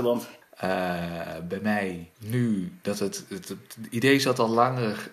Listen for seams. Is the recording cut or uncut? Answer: cut